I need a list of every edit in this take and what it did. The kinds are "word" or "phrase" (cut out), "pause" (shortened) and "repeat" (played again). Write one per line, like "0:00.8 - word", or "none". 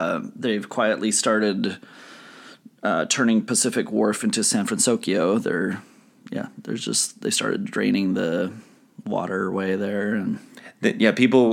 none